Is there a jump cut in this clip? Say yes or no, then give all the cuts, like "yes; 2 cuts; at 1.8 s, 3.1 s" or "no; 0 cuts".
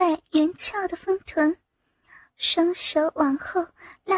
no; 0 cuts